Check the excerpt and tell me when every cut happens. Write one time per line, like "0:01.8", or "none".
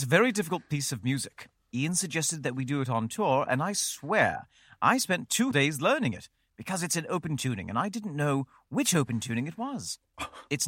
0:05.5